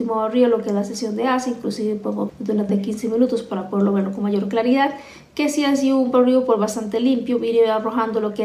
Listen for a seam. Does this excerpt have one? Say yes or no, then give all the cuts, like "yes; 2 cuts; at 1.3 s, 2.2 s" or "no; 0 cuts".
yes; 2 cuts; at 2.3 s, 2.7 s